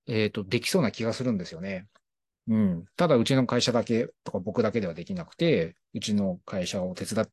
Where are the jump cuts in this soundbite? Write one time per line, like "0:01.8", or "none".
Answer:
none